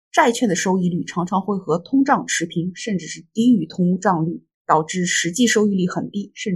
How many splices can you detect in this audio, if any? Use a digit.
1